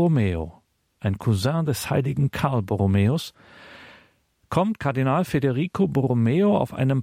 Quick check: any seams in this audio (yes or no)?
no